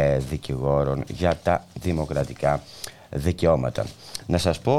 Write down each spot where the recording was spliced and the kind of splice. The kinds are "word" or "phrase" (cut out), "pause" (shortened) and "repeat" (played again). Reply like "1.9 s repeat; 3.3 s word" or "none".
none